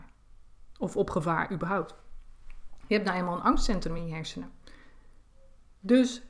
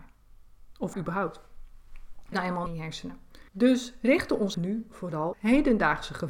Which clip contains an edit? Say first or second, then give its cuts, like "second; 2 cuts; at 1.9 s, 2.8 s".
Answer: second; 6 cuts; at 0.9 s, 2.3 s, 2.7 s, 3.5 s, 4.5 s, 5.3 s